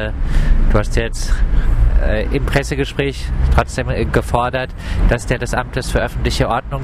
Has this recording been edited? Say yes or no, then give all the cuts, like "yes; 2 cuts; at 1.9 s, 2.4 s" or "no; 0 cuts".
yes; 1 cut; at 5.4 s